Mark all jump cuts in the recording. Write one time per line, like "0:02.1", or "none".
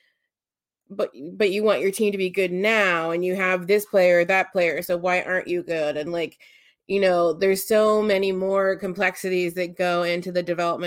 none